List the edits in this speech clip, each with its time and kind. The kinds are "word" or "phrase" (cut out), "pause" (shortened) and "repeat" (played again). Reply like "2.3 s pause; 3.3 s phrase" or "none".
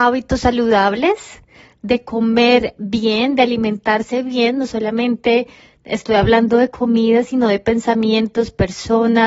none